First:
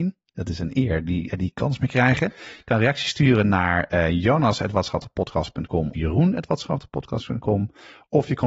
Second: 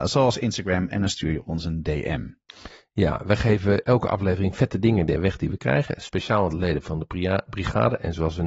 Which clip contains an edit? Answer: first; 3 cuts; at 1.3 s, 1.6 s, 5.9 s

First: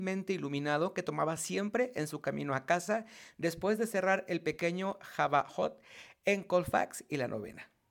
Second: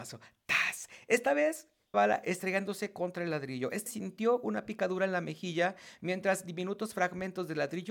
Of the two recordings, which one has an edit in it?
second; 2 cuts; at 1.9 s, 3.9 s

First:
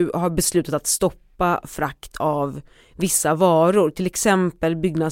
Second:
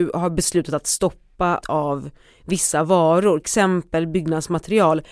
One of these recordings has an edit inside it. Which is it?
second; 2 cuts; at 1.6 s, 3.4 s

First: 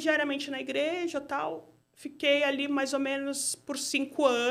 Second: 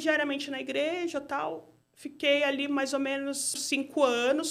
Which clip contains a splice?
second; 1 cut; at 3.6 s

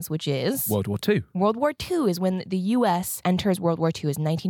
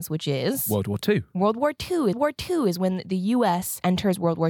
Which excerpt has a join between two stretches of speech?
second; 1 cut; at 2.1 s

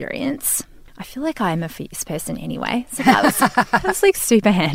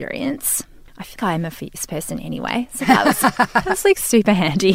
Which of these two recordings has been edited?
second; 1 cut; at 1.2 s

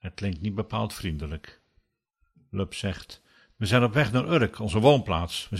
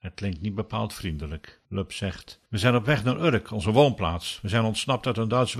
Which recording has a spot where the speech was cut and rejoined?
second; 2 cuts; at 1.6 s, 2.5 s

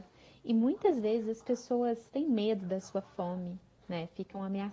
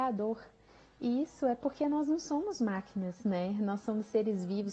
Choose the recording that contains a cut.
first; 1 cut; at 2.1 s

